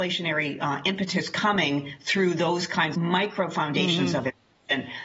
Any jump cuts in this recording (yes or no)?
yes